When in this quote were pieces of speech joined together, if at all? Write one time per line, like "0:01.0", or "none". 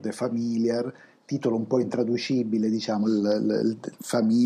none